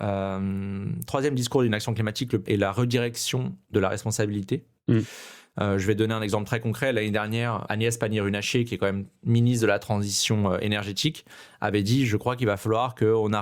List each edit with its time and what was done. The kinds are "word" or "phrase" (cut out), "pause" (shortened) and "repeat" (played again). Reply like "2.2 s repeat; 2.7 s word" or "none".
2.5 s word; 7.7 s word; 9.2 s pause